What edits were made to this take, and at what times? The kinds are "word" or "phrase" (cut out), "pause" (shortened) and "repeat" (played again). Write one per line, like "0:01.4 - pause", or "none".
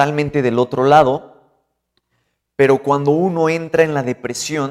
none

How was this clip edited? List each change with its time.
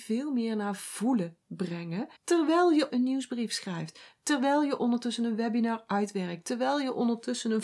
0:02.2 - pause
0:02.9 - word

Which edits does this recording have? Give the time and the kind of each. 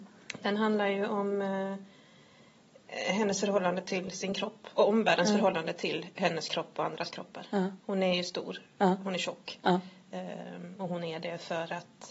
0:07.8 - pause

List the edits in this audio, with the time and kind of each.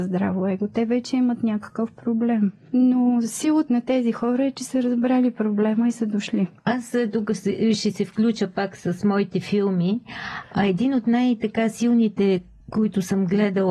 0:03.7 - word

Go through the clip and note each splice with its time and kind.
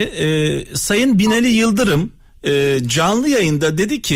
0:02.2 - pause

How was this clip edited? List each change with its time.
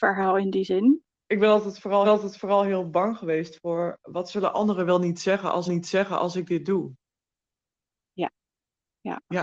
0:02.0 - repeat
0:05.7 - repeat

